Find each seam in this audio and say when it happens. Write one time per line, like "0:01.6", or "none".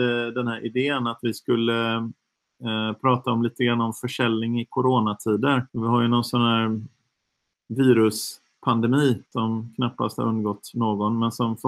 0:05.7
0:09.3